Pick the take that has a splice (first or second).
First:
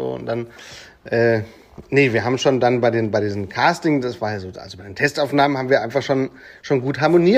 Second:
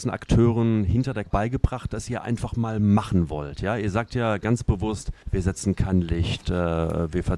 second